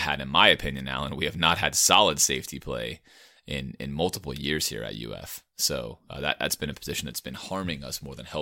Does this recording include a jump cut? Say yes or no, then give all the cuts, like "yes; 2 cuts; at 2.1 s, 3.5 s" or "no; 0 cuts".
no; 0 cuts